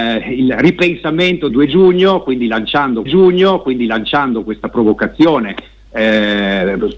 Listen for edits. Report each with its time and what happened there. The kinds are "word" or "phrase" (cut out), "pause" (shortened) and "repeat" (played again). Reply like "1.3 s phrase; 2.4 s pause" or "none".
1.5 s phrase; 3.1 s repeat